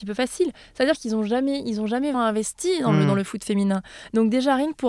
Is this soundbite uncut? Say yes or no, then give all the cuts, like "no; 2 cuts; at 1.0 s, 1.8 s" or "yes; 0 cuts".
no; 1 cut; at 2.1 s